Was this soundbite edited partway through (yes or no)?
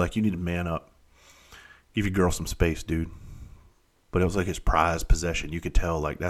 no